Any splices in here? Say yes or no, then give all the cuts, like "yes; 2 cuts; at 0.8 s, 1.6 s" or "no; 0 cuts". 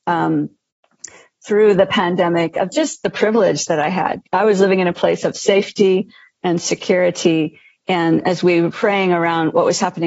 no; 0 cuts